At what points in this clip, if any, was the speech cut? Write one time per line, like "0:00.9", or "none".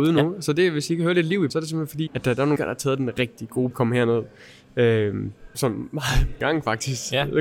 0:01.5
0:02.1
0:02.6
0:03.2
0:03.7
0:05.5
0:06.4

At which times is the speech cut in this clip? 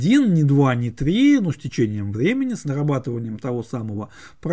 none

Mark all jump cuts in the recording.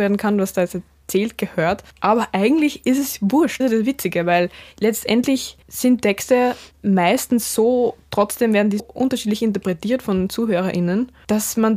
0:01.9
0:03.6
0:05.6
0:06.7
0:08.8

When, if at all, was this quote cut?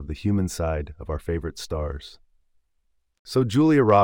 none

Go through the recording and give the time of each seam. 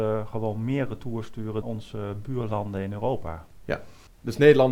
0:01.6

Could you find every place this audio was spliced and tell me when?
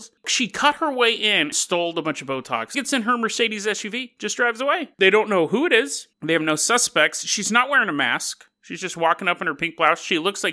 0:01.5
0:02.7
0:04.9
0:06.1

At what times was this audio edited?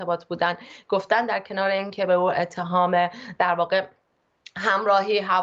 none

